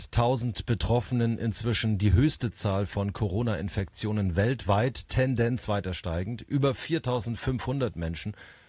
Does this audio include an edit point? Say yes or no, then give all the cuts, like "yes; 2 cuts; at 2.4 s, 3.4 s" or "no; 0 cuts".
no; 0 cuts